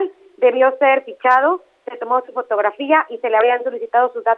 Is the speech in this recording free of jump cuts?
yes; 0 cuts

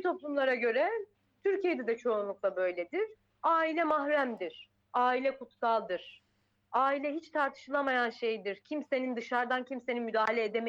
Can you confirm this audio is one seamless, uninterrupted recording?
yes; 0 cuts

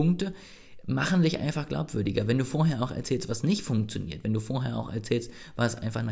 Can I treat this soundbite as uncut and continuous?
yes; 0 cuts

